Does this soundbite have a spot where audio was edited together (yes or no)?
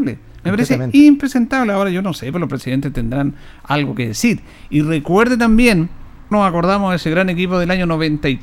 yes